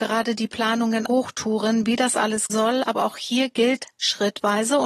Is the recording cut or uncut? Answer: cut